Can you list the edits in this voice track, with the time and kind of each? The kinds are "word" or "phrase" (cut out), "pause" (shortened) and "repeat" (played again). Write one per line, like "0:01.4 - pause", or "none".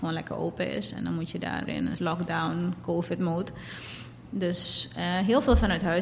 0:01.7 - word
0:02.0 - word